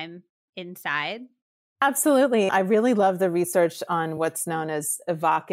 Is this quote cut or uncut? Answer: uncut